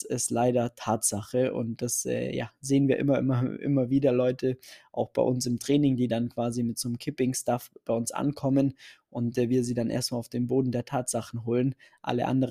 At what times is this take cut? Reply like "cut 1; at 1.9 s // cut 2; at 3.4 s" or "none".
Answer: none